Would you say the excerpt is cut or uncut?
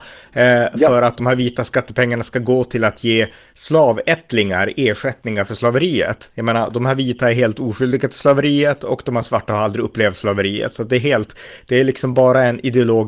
uncut